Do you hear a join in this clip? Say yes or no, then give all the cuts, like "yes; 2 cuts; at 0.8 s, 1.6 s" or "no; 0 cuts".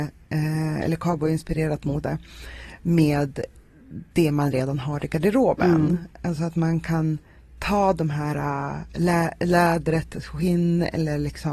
no; 0 cuts